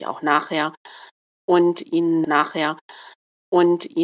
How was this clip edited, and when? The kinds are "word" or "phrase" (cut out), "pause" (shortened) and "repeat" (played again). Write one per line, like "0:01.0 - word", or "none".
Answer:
0:02.2 - repeat